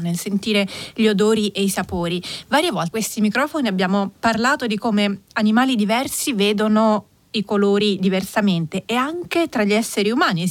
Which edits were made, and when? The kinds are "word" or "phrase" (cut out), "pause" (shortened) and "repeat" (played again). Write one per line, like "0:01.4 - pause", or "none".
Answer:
0:02.9 - word